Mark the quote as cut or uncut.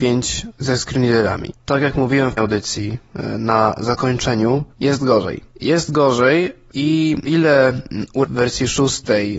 cut